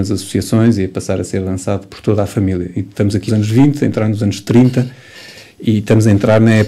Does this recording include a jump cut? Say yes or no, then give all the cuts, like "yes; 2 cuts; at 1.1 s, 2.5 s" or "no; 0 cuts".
yes; 2 cuts; at 1.9 s, 3.3 s